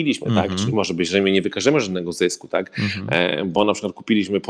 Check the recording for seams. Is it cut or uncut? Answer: uncut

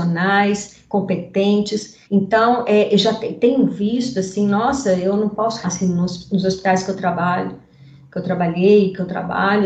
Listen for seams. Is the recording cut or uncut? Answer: cut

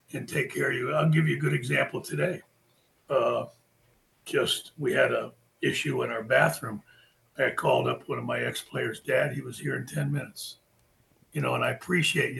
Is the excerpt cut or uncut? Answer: uncut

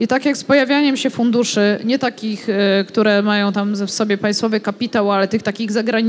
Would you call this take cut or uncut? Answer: uncut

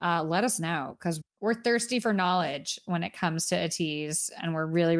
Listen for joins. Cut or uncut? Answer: cut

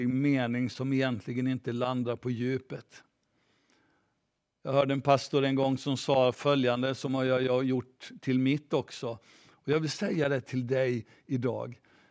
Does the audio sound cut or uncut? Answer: uncut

